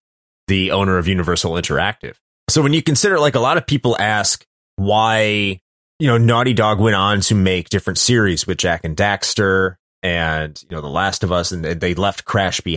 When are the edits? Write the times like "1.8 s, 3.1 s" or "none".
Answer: none